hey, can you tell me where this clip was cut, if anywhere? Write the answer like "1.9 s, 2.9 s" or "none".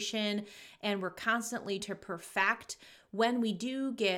1.8 s